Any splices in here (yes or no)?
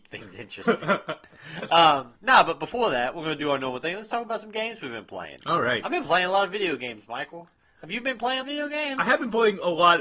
yes